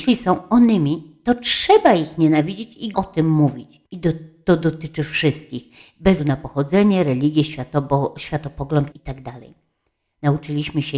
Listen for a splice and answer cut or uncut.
cut